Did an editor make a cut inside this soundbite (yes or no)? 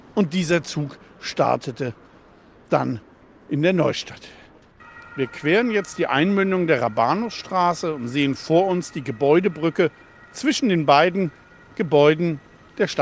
no